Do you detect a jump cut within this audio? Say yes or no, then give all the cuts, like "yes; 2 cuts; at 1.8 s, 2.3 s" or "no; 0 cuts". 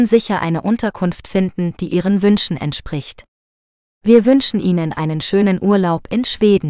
no; 0 cuts